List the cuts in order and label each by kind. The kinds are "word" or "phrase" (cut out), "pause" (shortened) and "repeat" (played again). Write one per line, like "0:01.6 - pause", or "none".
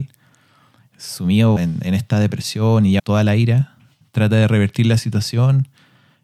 0:01.6 - word
0:03.0 - phrase
0:04.0 - word